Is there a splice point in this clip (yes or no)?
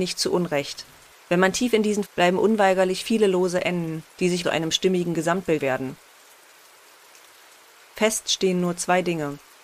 yes